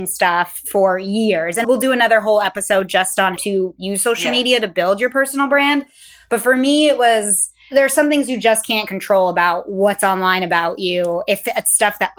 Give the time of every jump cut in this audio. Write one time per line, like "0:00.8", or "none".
0:01.6
0:03.4